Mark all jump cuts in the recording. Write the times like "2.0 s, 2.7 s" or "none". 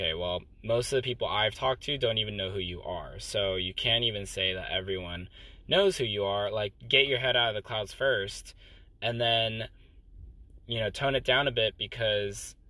6.8 s